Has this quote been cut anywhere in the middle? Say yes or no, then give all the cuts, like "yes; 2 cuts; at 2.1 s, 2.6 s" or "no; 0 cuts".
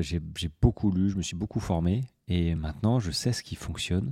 no; 0 cuts